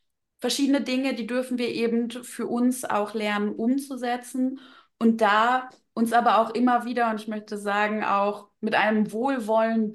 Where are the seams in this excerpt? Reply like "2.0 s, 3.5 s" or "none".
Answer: none